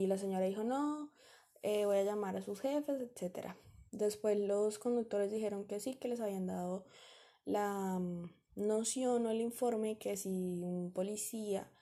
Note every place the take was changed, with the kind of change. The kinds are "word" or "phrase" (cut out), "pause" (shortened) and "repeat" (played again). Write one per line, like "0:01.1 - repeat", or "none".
0:03.9 - pause